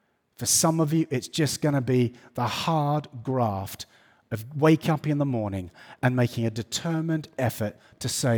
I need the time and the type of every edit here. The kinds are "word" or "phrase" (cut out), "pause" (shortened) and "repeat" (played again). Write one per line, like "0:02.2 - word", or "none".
none